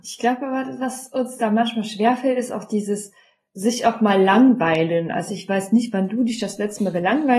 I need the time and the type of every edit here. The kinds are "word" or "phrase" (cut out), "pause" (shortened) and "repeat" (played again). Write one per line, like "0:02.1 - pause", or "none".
none